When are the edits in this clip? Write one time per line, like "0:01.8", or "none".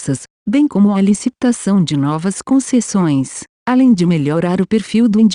none